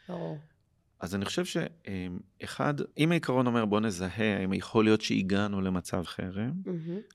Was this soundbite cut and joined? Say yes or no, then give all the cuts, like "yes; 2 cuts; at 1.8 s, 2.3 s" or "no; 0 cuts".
yes; 2 cuts; at 2.9 s, 6.1 s